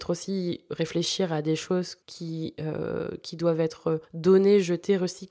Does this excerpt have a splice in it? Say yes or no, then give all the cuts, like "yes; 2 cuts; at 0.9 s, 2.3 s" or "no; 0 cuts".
yes; 2 cuts; at 2.0 s, 4.0 s